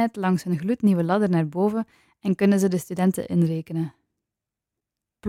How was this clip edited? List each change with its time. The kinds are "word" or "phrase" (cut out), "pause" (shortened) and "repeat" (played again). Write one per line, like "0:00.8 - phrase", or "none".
none

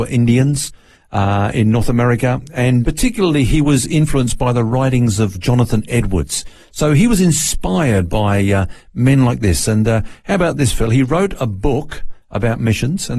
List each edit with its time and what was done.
0:02.8 - word
0:05.3 - word

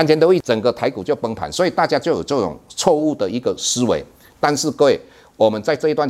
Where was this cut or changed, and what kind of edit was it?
none

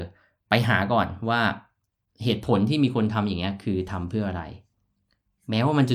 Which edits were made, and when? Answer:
none

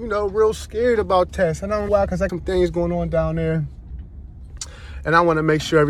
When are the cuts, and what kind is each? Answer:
0:01.3 - word
0:01.9 - word
0:02.3 - word

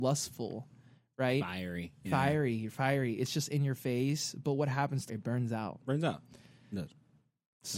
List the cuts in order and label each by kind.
0:05.1 - phrase

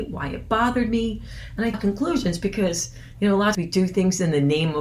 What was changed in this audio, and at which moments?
0:01.7 - phrase
0:03.5 - word

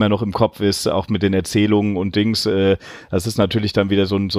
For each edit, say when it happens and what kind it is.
none

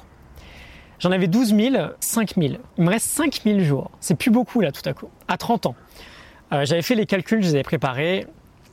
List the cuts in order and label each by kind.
0:02.0 - phrase
0:02.7 - pause
0:04.0 - pause
0:05.2 - pause

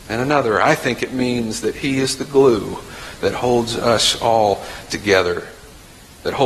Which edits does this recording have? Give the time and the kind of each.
none

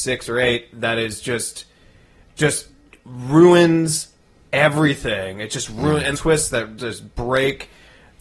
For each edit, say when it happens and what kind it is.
0:06.1 - phrase

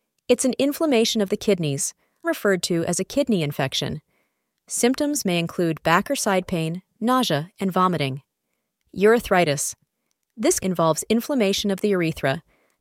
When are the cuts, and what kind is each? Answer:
0:02.2 - word
0:06.9 - word
0:10.6 - word

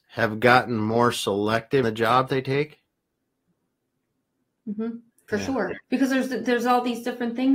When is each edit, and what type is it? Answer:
0:01.8 - word
0:02.3 - word
0:05.1 - pause
0:05.8 - pause

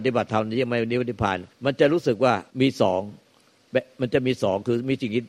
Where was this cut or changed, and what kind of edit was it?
0:01.5 - pause
0:02.5 - pause

